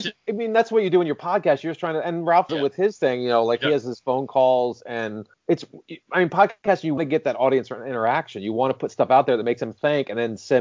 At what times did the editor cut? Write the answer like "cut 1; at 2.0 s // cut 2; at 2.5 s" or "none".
cut 1; at 2.5 s // cut 2; at 5.3 s // cut 3; at 7.0 s